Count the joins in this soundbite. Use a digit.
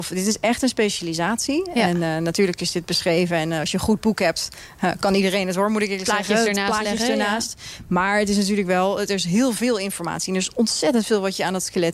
0